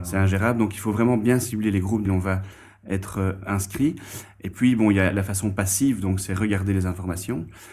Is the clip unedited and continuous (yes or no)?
no